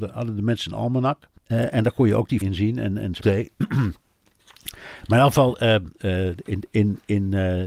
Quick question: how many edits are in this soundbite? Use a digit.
3